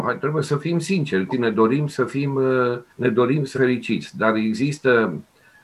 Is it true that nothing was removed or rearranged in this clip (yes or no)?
no